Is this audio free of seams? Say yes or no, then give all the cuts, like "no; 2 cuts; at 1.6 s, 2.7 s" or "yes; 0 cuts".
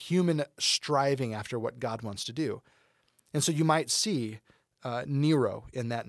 yes; 0 cuts